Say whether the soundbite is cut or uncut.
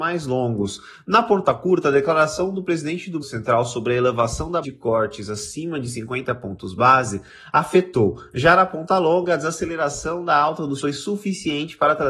cut